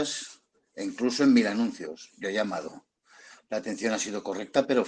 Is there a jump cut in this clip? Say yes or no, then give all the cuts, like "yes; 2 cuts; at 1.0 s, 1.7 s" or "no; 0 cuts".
no; 0 cuts